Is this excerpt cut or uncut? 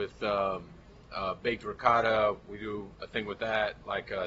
uncut